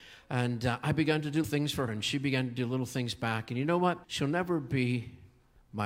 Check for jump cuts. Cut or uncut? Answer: cut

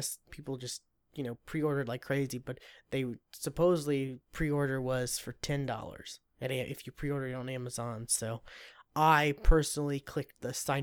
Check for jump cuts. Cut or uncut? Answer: cut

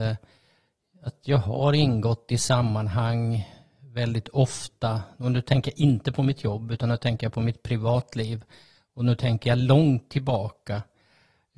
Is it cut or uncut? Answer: uncut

